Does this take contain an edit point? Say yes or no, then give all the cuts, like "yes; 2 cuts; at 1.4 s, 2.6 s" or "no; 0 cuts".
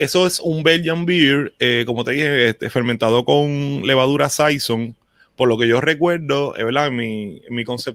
no; 0 cuts